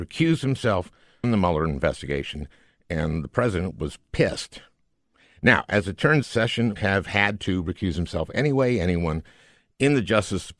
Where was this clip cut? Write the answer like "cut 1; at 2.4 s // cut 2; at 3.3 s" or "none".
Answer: cut 1; at 1.2 s // cut 2; at 3.7 s // cut 3; at 6.2 s // cut 4; at 6.8 s